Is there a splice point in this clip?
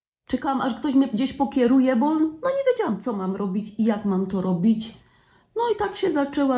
no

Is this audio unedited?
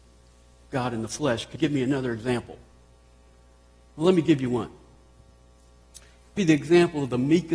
no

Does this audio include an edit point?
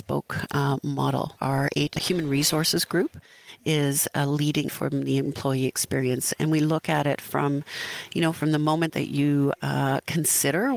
yes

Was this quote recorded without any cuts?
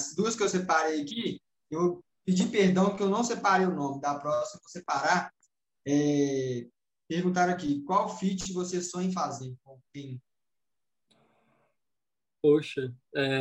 yes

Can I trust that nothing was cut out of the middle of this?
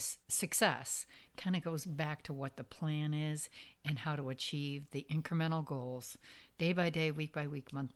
yes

